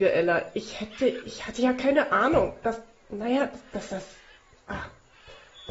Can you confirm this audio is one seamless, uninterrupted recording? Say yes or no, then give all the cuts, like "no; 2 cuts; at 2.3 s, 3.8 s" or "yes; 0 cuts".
yes; 0 cuts